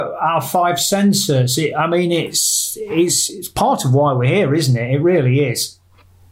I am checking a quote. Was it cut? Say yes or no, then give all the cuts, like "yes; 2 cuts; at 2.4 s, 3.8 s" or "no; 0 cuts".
no; 0 cuts